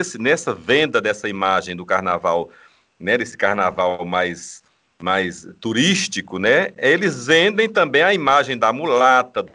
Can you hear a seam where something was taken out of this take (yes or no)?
no